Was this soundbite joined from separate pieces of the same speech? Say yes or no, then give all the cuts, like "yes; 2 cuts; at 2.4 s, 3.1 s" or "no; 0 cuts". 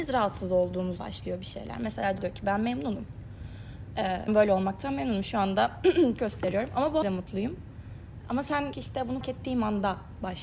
yes; 7 cuts; at 1.0 s, 2.2 s, 4.3 s, 6.2 s, 7.0 s, 8.7 s, 9.2 s